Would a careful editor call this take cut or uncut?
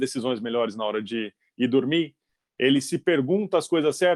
uncut